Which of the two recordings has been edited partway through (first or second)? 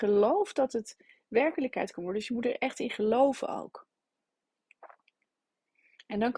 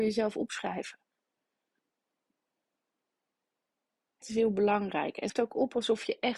second